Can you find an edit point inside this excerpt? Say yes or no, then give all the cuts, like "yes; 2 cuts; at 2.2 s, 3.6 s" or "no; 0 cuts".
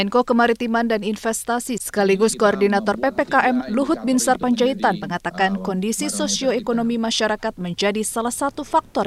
no; 0 cuts